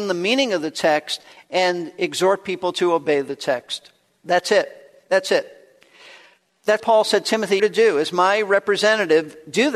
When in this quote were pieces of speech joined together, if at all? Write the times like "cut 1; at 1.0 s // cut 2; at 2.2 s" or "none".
cut 1; at 6.8 s // cut 2; at 7.6 s